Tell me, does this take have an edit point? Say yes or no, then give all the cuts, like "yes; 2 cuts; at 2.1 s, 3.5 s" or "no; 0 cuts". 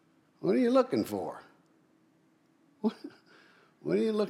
no; 0 cuts